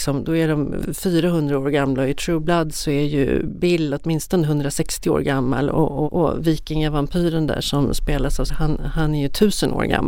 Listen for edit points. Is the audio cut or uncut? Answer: cut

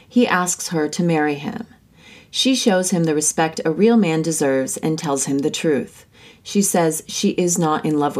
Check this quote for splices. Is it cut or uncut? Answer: uncut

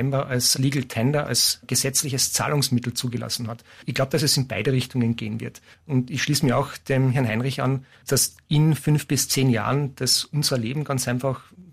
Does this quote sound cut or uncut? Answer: cut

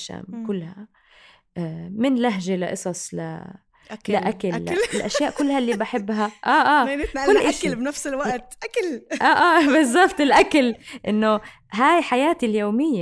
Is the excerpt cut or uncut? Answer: uncut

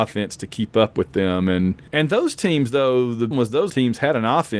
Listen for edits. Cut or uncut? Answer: cut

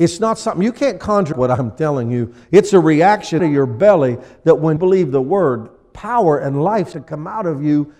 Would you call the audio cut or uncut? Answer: cut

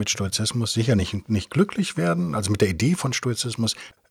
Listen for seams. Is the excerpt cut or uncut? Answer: uncut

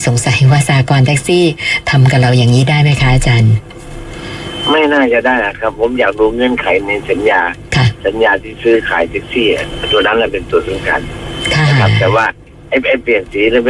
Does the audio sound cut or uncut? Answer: uncut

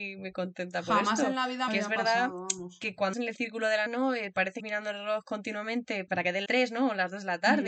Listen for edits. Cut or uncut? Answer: cut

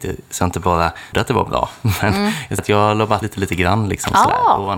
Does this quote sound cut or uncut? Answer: cut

